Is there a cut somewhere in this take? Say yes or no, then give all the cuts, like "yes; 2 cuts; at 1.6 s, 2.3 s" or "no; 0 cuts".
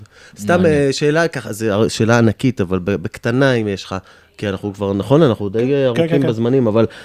no; 0 cuts